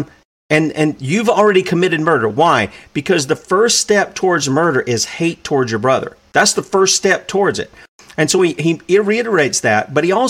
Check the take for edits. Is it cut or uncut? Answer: uncut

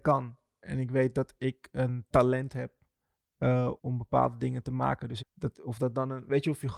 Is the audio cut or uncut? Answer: cut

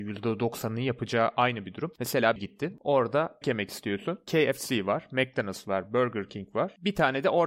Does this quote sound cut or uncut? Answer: cut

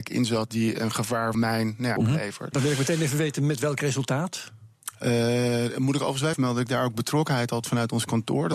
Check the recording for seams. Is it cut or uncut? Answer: cut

